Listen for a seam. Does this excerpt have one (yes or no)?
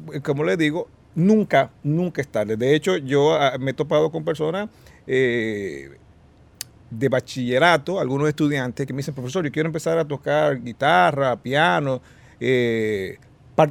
no